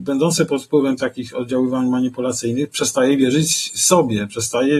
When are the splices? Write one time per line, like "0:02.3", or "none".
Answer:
0:01.0

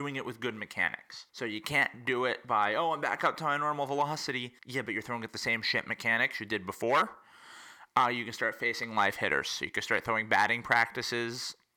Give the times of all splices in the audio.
0:01.3
0:04.6

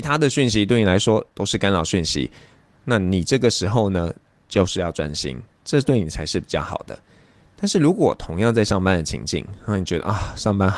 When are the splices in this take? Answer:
none

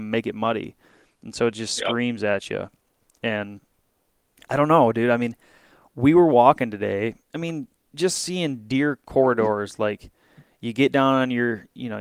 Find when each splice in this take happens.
0:07.3

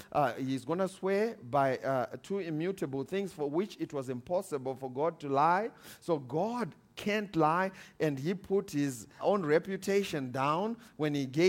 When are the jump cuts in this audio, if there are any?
0:09.2

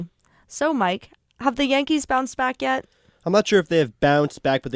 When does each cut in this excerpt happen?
none

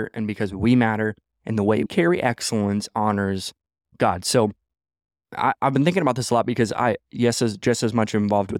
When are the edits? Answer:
0:01.9

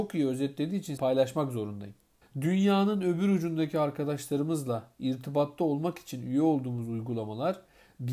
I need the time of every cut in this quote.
0:01.0
0:02.2

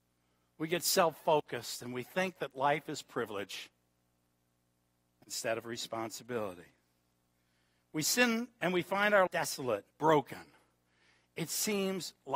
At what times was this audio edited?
0:09.3
0:09.9

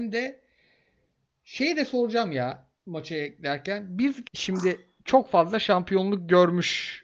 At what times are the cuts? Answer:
0:02.8
0:04.3

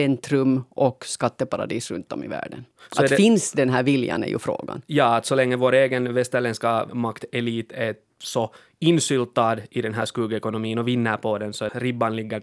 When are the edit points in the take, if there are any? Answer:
none

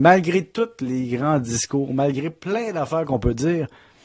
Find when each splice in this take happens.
none

